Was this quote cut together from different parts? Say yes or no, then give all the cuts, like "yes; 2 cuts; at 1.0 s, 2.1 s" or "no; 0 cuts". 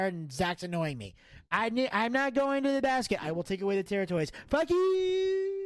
no; 0 cuts